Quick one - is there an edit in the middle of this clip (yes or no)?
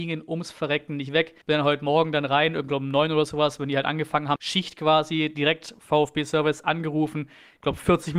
yes